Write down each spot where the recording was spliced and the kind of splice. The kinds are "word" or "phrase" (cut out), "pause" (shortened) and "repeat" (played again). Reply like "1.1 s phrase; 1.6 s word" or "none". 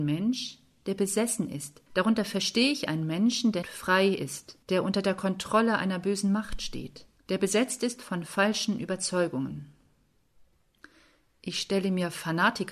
1.9 s pause; 3.6 s word; 4.6 s pause; 7.2 s pause